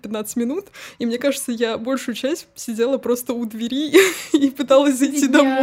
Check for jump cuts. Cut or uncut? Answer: uncut